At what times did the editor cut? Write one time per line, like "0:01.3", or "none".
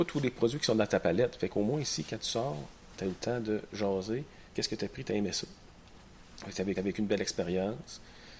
0:04.5
0:06.8